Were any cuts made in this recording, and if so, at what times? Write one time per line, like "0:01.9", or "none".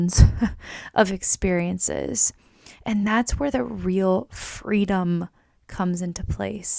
none